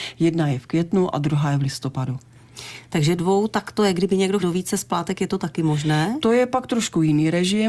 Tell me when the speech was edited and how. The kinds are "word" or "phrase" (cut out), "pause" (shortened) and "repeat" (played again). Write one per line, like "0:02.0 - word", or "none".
0:03.2 - word
0:04.4 - word